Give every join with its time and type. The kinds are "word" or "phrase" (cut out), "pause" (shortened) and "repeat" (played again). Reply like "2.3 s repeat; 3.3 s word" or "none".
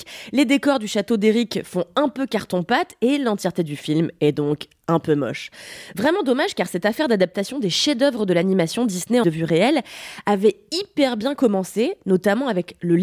9.2 s phrase